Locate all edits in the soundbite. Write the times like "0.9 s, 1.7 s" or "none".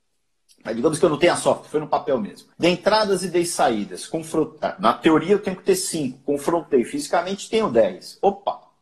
2.5 s

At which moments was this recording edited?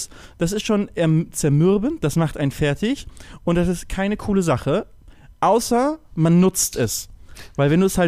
none

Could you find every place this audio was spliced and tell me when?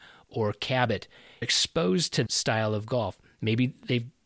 1.4 s, 2.3 s

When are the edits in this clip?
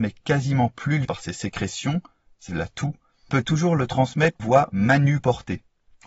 1.0 s, 2.5 s, 3.3 s, 4.4 s

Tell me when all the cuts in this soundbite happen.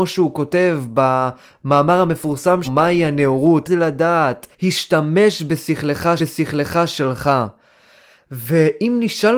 2.6 s, 3.7 s, 4.5 s, 6.2 s

